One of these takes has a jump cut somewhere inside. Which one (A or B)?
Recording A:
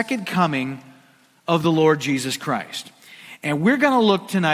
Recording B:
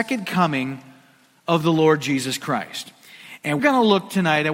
B